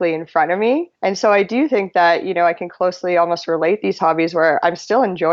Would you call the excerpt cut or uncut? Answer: cut